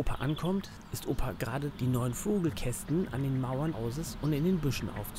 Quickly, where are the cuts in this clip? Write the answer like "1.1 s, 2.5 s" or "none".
1.7 s, 3.7 s